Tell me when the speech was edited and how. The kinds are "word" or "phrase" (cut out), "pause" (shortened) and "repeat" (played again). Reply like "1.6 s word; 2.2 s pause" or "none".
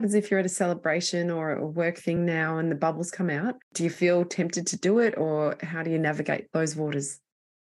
none